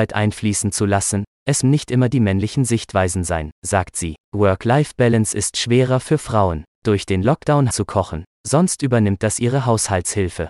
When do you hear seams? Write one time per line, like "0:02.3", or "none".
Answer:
0:01.6
0:04.2
0:06.7
0:07.7